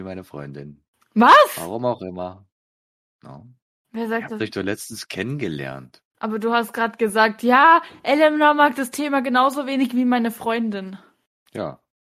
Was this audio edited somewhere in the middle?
no; 0 cuts

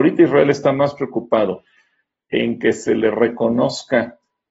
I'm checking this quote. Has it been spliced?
no; 0 cuts

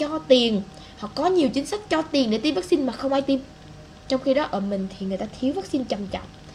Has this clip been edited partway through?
no; 0 cuts

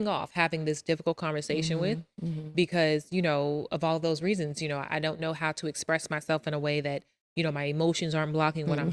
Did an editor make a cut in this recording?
no; 0 cuts

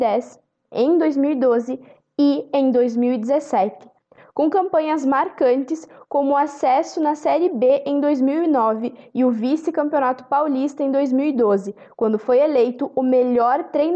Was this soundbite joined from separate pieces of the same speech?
no; 0 cuts

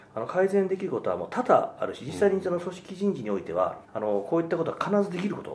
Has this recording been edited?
yes; 1 cut; at 3.8 s

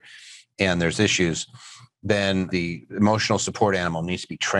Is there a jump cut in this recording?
no; 0 cuts

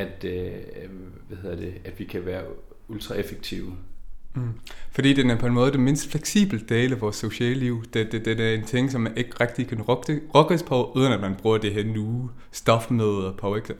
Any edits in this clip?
no; 0 cuts

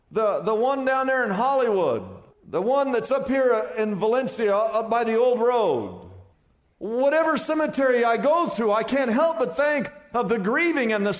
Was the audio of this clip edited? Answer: yes; 2 cuts; at 2.3 s, 6.3 s

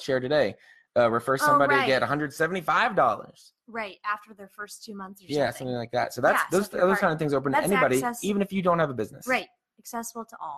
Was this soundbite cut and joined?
no; 0 cuts

